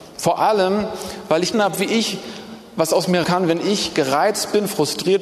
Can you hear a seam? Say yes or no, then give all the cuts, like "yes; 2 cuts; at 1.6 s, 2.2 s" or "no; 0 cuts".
yes; 2 cuts; at 1.5 s, 3.2 s